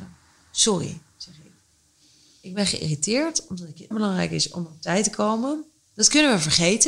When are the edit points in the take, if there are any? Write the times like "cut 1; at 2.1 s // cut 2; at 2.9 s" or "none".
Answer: cut 1; at 3.9 s

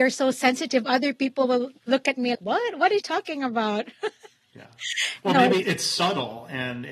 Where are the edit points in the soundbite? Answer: cut 1; at 1.8 s // cut 2; at 2.3 s // cut 3; at 3.0 s // cut 4; at 5.6 s

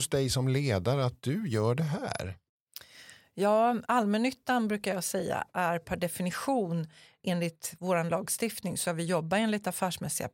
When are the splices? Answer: cut 1; at 3.9 s // cut 2; at 7.2 s // cut 3; at 8.9 s

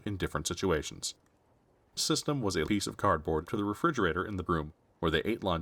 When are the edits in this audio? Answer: cut 1; at 2.0 s // cut 2; at 2.7 s // cut 3; at 3.5 s // cut 4; at 4.5 s

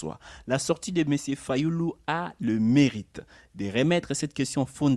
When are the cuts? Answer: none

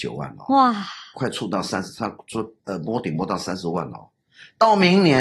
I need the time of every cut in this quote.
cut 1; at 2.6 s

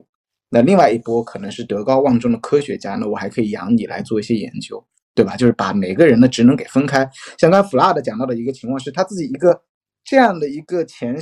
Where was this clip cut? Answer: none

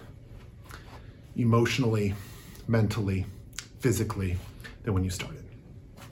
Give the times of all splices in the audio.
none

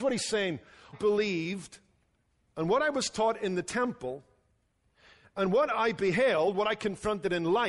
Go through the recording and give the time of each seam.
cut 1; at 0.9 s

